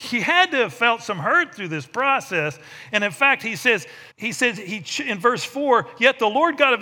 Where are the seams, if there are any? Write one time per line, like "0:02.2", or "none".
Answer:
0:04.1